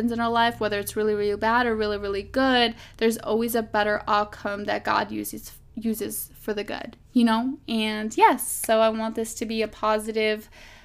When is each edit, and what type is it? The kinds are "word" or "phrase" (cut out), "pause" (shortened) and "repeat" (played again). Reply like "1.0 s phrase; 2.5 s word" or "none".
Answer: none